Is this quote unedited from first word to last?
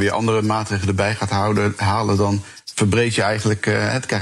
yes; 0 cuts

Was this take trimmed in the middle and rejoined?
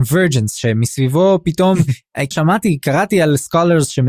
yes; 1 cut; at 2.3 s

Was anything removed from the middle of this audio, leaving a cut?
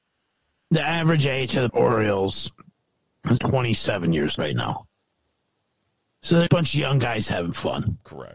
yes; 4 cuts; at 1.7 s, 3.4 s, 4.4 s, 6.5 s

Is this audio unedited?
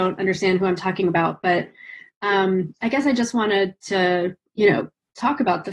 yes; 0 cuts

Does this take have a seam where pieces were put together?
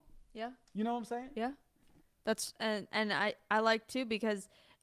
no; 0 cuts

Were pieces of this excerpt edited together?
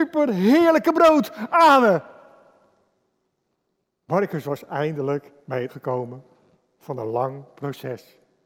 yes; 1 cut; at 5.7 s

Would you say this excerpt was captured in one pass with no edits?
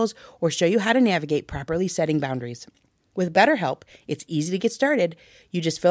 yes; 0 cuts

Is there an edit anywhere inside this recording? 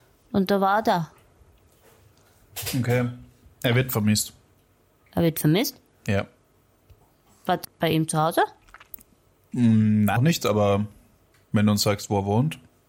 yes; 2 cuts; at 7.6 s, 10.2 s

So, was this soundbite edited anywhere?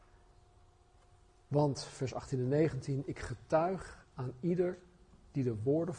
no; 0 cuts

